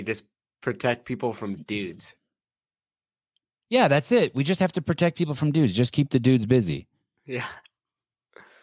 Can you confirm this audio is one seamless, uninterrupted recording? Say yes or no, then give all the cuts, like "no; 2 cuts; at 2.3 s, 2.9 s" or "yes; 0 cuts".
yes; 0 cuts